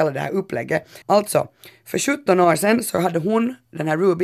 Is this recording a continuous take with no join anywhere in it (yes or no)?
no